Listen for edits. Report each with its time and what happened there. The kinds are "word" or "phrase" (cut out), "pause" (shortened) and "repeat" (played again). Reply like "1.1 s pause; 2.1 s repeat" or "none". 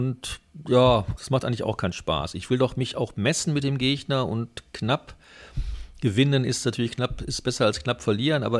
none

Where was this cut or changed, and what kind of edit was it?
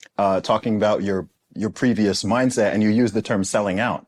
none

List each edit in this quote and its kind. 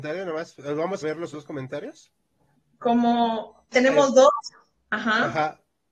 1.0 s word; 1.3 s word; 3.7 s word

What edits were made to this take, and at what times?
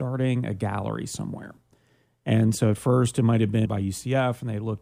3.7 s word

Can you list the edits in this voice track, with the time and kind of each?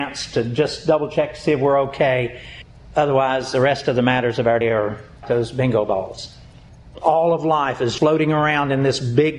4.6 s word; 5.2 s word; 8.0 s word

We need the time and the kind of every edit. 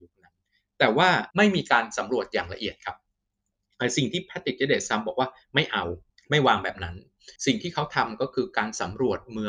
1.3 s pause; 6.1 s pause; 7.4 s pause

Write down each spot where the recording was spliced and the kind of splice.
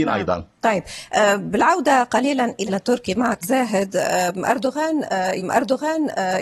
2.7 s word; 3.4 s word; 5.4 s repeat

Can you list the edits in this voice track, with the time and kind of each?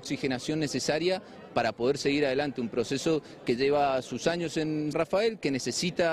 1.5 s word; 3.6 s word; 4.9 s word

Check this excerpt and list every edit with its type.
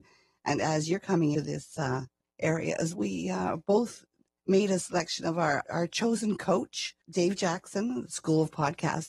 1.3 s word; 2.9 s word

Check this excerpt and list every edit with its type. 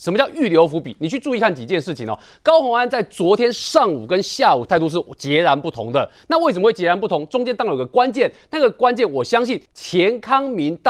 9.6 s pause

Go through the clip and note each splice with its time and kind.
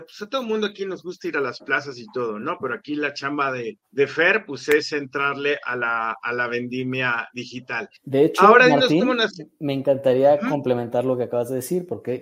3.9 s pause; 8.0 s pause

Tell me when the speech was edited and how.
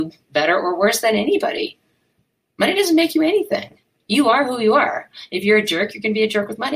none

